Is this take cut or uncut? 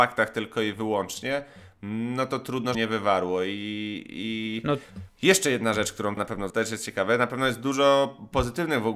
cut